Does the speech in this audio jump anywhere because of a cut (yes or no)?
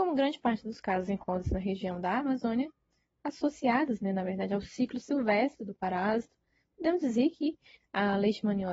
no